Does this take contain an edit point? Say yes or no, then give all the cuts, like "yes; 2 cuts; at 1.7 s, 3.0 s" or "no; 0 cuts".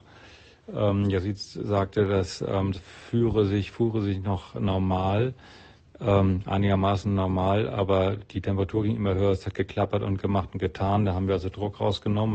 yes; 1 cut; at 2.8 s